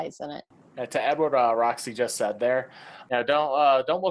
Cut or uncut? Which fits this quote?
uncut